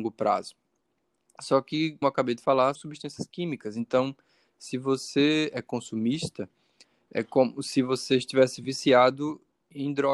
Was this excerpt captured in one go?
no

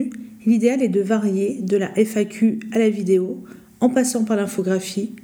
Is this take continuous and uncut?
yes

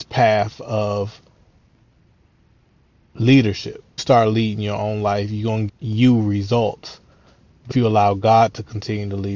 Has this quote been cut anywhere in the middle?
yes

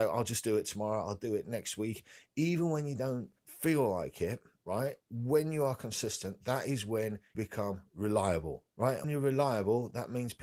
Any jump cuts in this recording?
yes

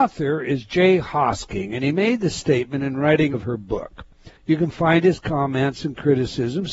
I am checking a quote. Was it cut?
yes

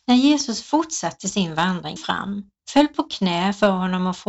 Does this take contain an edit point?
yes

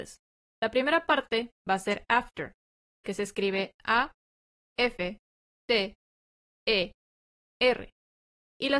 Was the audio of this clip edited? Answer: no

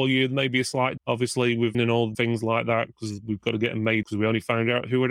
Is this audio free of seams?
no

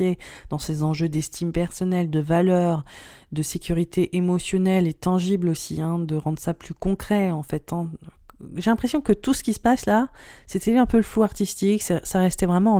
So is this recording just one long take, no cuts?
yes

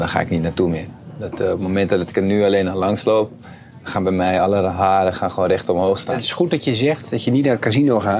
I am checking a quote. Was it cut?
no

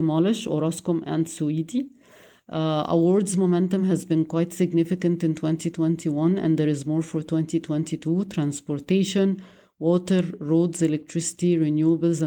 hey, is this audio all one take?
yes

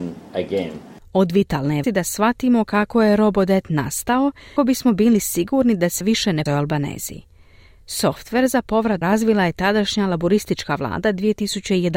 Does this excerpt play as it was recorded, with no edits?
no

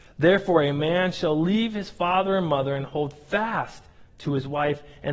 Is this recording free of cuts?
yes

